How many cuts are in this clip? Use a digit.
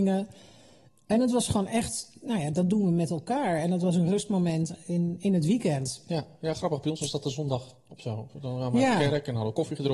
0